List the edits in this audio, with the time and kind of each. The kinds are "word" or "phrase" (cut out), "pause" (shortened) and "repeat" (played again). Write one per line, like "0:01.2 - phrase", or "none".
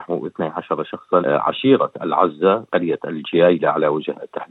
0:01.2 - word
0:02.7 - word

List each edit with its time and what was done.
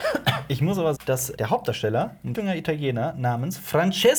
0:00.9 - word
0:01.3 - word
0:02.3 - word

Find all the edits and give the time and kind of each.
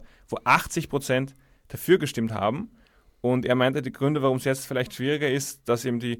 none

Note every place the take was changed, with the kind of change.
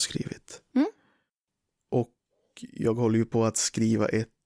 none

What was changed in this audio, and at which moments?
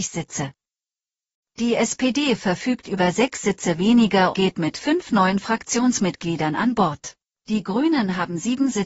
0:04.3 - word
0:07.2 - pause

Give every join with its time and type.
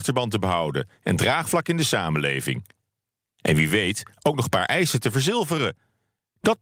none

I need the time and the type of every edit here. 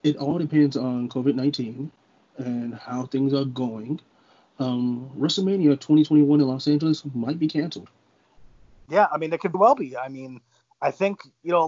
0:09.5 - word

